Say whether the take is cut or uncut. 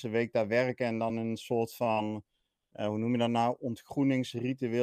uncut